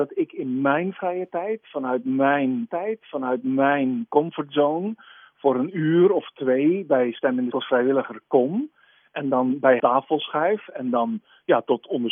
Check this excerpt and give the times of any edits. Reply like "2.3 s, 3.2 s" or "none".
2.7 s, 7.5 s, 9.8 s